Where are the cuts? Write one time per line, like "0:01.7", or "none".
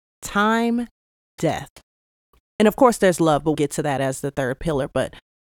0:01.4
0:03.5